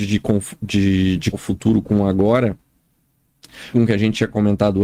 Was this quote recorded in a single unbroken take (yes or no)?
no